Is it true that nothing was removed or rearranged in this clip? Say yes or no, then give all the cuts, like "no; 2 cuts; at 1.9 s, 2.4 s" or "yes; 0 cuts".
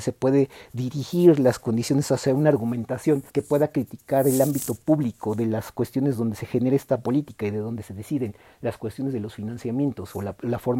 no; 1 cut; at 3.3 s